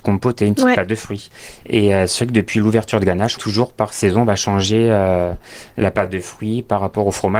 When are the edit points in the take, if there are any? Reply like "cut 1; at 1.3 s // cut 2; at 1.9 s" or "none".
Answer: cut 1; at 3.4 s